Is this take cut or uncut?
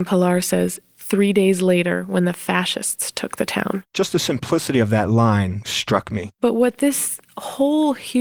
cut